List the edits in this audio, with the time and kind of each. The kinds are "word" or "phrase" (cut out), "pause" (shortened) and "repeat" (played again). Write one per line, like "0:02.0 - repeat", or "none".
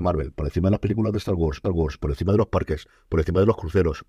0:01.6 - repeat